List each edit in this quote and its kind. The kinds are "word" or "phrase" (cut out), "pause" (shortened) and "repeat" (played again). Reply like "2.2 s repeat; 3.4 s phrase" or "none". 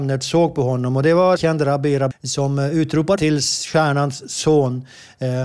1.4 s word; 2.1 s word; 3.2 s word